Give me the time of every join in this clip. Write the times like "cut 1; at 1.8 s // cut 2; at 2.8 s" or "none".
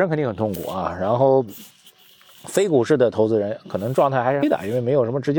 cut 1; at 4.4 s

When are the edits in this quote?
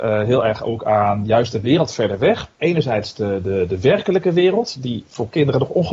cut 1; at 2.5 s

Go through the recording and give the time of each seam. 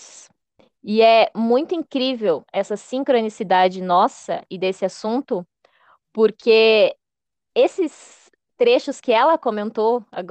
none

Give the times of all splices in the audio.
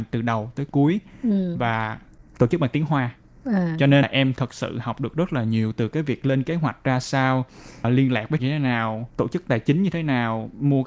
cut 1; at 4.0 s // cut 2; at 7.8 s // cut 3; at 8.4 s // cut 4; at 9.1 s

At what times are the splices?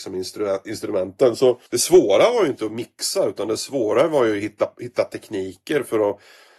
cut 1; at 1.7 s

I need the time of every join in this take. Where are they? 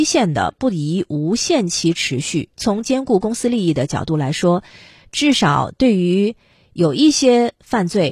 none

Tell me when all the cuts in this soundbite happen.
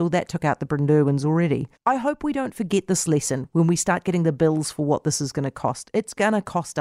cut 1; at 1.8 s

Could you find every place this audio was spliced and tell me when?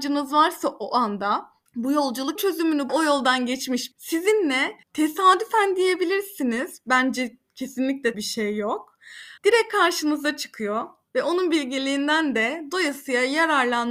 cut 1; at 1.7 s // cut 2; at 2.4 s // cut 3; at 2.9 s // cut 4; at 3.9 s // cut 5; at 4.8 s // cut 6; at 8.1 s // cut 7; at 9.4 s

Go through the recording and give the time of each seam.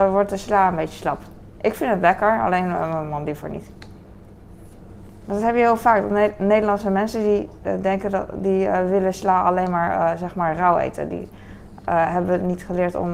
none

